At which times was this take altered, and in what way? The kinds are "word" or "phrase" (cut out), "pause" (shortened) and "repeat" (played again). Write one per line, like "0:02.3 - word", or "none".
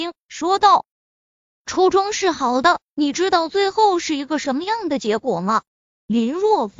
0:00.9 - pause
0:05.7 - pause